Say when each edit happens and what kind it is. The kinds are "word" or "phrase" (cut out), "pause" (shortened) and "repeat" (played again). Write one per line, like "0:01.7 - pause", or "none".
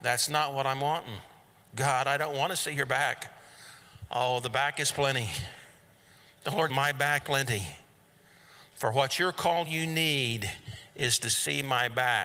0:06.7 - word
0:07.2 - word
0:09.7 - phrase